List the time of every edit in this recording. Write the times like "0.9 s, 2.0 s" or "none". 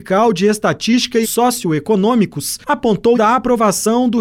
1.2 s, 3.1 s